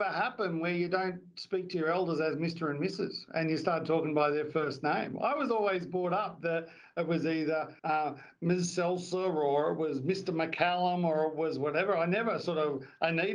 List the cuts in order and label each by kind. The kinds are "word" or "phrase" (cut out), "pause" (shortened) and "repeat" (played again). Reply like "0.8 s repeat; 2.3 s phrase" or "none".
7.8 s pause